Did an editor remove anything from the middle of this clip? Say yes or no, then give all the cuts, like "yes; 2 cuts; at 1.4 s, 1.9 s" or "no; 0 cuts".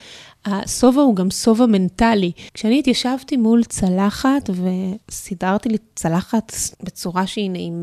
yes; 3 cuts; at 2.5 s, 5.0 s, 6.7 s